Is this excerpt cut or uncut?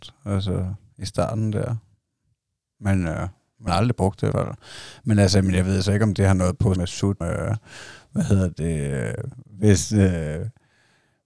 cut